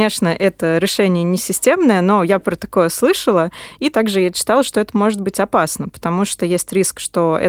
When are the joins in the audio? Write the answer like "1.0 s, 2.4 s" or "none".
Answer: none

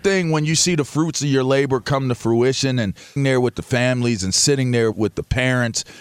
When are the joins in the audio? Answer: 3.2 s, 4.9 s

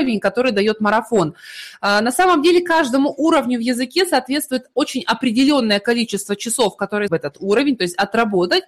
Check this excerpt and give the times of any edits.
7.1 s

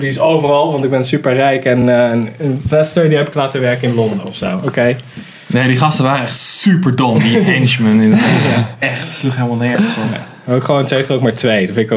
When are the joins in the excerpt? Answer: none

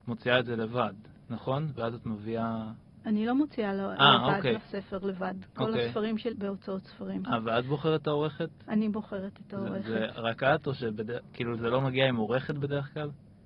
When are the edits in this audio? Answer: 4.6 s, 6.3 s

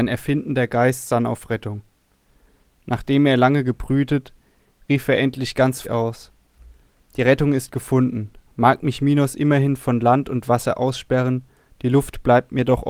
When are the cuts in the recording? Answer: 5.8 s

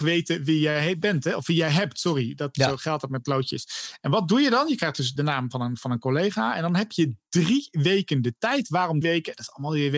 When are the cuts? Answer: 5.2 s, 9.0 s

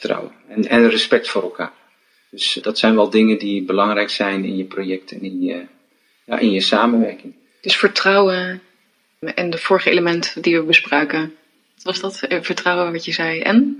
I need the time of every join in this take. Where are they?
2.6 s, 9.2 s

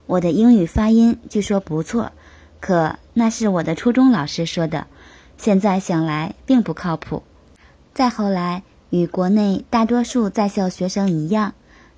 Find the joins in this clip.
none

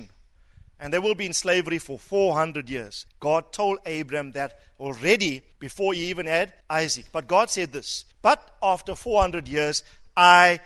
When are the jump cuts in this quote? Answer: 3.1 s, 5.5 s, 6.6 s, 8.1 s

